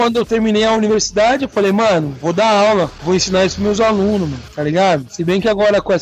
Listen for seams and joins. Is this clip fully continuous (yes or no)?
yes